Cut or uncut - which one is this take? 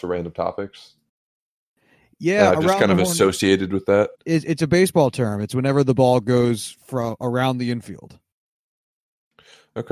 cut